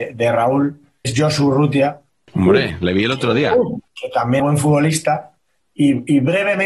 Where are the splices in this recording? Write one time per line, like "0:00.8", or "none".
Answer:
0:01.0
0:02.1
0:04.4